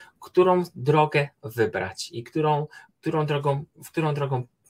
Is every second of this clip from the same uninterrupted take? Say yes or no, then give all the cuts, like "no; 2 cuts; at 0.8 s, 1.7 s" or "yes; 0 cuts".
no; 1 cut; at 3.7 s